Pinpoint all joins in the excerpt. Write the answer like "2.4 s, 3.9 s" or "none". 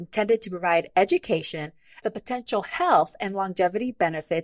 2.0 s